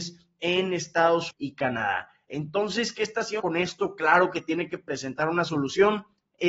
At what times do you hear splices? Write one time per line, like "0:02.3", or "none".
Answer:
0:01.3
0:03.4